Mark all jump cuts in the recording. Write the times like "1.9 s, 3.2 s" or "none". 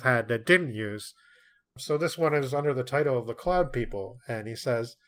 none